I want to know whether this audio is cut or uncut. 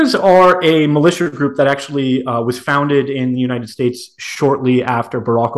uncut